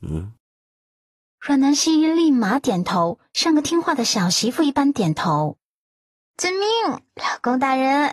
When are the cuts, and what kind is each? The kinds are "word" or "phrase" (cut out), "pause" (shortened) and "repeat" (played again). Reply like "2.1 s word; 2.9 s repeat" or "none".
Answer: none